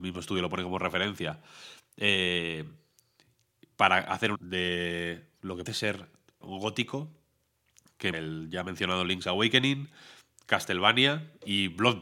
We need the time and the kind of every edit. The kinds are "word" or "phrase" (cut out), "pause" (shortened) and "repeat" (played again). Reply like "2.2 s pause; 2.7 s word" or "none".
4.4 s word; 5.7 s word; 6.4 s word; 8.1 s word